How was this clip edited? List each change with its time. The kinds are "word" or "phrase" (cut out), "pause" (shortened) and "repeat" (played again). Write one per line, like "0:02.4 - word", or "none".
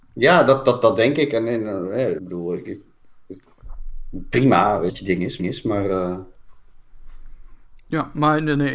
0:02.2 - word
0:04.9 - word
0:05.4 - repeat